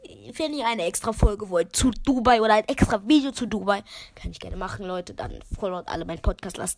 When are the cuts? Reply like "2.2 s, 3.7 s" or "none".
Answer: none